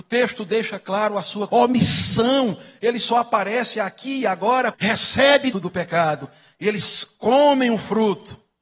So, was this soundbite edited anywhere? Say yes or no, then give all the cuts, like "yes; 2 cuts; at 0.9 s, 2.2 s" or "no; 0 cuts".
yes; 3 cuts; at 1.5 s, 4.7 s, 5.5 s